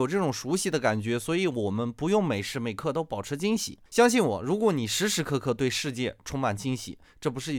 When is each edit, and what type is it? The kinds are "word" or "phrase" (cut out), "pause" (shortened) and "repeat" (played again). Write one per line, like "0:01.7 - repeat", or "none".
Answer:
0:03.9 - pause